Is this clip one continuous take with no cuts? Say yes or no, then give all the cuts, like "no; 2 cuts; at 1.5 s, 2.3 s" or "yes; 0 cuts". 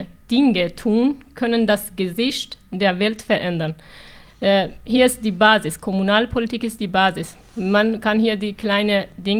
yes; 0 cuts